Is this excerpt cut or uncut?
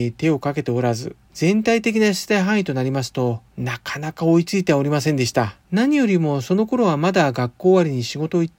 cut